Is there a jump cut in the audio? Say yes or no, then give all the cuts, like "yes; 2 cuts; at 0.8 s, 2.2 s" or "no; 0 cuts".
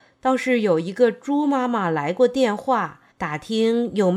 yes; 1 cut; at 3.1 s